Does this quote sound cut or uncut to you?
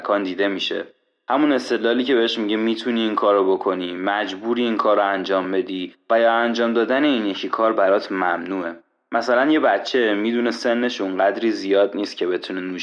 uncut